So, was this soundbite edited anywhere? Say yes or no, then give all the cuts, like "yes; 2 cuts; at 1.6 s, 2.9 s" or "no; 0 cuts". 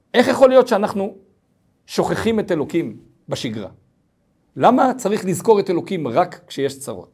no; 0 cuts